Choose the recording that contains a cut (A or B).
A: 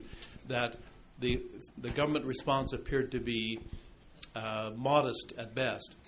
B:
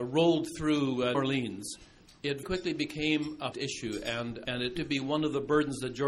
B